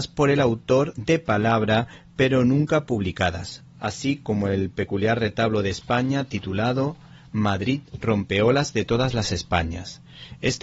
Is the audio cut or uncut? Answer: uncut